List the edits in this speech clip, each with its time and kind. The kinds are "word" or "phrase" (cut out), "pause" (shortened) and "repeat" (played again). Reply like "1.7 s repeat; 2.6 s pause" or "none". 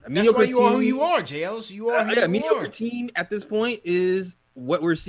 none